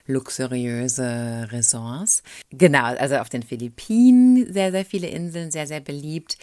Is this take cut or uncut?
uncut